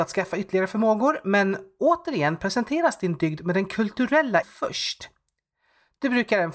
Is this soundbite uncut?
no; 1 cut; at 4.4 s

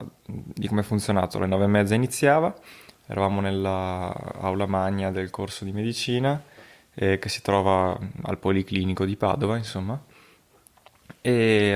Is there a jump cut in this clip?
no; 0 cuts

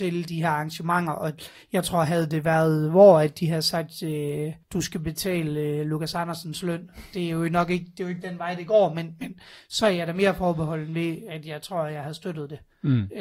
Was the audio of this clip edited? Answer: yes; 1 cut; at 4.6 s

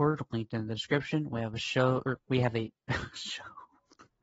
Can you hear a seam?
yes; 1 cut; at 2.2 s

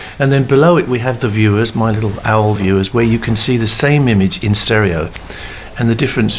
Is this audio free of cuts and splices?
yes; 0 cuts

